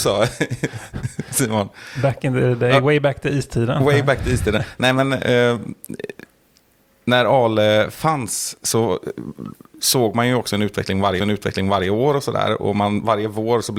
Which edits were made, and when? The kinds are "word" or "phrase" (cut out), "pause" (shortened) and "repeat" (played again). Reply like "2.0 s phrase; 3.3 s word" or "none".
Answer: 11.2 s repeat